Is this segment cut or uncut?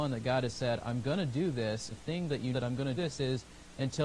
cut